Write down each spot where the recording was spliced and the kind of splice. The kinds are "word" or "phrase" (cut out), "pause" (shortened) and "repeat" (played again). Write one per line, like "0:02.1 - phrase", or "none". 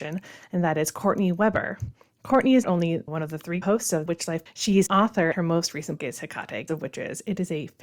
0:02.6 - word
0:03.1 - word
0:03.6 - word
0:04.1 - word
0:04.5 - word
0:04.9 - word
0:05.3 - word
0:06.0 - word
0:06.7 - word